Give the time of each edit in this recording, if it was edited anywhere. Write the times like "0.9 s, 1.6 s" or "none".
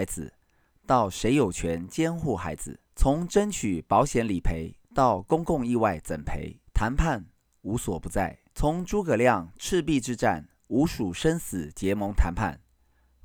2.9 s, 4.8 s, 6.7 s, 8.5 s